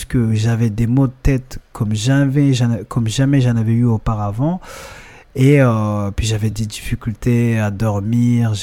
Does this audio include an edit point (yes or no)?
no